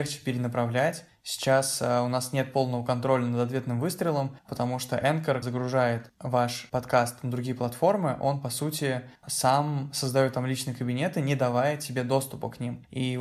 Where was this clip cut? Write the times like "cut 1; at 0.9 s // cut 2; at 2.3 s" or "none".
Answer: cut 1; at 5.4 s